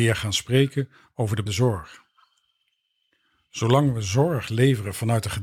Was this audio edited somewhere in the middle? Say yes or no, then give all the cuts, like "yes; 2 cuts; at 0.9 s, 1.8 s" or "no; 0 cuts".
yes; 1 cut; at 1.5 s